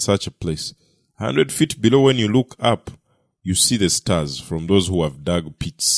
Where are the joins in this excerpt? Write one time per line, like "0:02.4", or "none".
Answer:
none

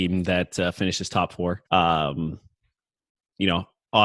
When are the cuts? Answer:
0:01.7

